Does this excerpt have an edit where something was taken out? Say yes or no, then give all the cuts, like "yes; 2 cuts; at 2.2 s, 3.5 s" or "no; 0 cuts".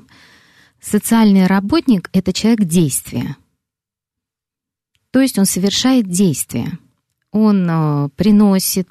no; 0 cuts